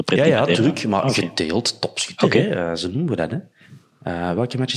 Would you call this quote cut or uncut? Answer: uncut